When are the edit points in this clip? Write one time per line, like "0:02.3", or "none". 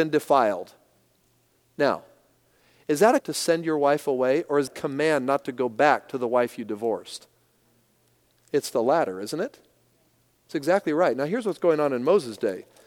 0:03.2
0:04.7